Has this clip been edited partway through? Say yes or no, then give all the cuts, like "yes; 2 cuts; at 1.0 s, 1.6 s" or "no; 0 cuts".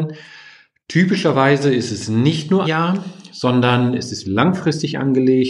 yes; 2 cuts; at 2.6 s, 4.2 s